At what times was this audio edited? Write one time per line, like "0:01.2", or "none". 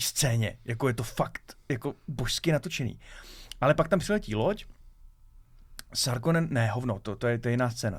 none